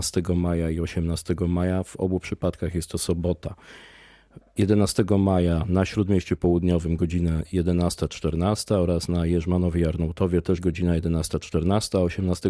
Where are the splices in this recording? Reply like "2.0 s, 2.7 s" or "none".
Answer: none